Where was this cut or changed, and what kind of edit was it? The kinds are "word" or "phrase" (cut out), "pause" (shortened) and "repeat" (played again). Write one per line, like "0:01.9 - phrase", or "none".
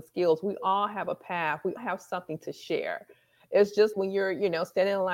0:01.8 - word
0:03.9 - word